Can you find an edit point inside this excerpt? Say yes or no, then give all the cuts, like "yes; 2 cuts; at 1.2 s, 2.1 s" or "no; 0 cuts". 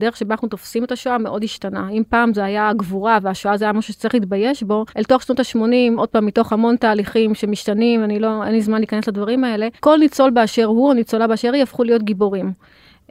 yes; 2 cuts; at 4.9 s, 9.8 s